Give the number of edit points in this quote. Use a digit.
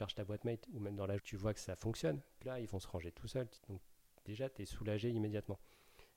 3